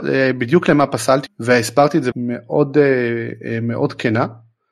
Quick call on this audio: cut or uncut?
cut